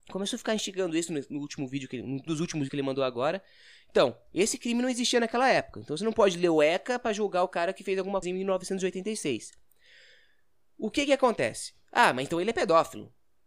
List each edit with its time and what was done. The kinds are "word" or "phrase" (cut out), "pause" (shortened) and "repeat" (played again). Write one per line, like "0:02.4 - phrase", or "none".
0:02.3 - word
0:02.7 - word
0:08.2 - word